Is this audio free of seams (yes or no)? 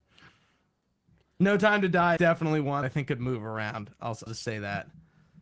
no